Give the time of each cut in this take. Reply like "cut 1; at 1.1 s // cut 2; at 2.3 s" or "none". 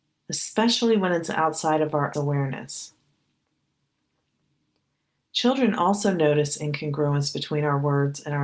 cut 1; at 2.1 s